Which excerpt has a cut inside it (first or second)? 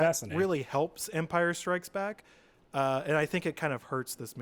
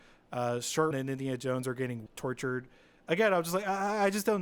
second